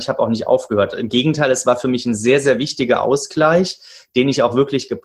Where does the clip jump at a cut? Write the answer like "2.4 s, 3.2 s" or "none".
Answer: none